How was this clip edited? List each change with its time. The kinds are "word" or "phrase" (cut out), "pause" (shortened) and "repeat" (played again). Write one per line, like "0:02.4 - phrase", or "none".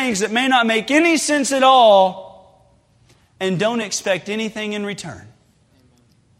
none